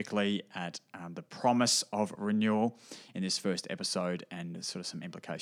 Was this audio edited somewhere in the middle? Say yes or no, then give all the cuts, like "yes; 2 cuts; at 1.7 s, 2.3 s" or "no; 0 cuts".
no; 0 cuts